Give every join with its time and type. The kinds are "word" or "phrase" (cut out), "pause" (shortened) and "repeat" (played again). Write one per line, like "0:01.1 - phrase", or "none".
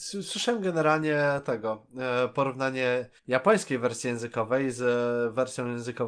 0:03.2 - pause